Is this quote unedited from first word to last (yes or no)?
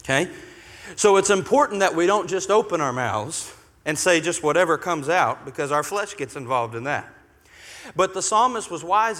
yes